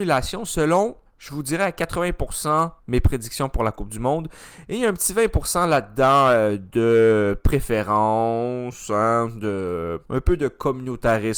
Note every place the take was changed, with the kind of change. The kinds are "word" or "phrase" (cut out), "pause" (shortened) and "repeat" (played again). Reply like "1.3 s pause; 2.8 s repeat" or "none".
1.1 s pause; 2.8 s pause; 10.1 s pause